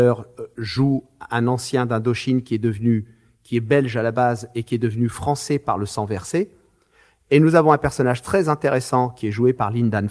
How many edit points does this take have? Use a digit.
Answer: 0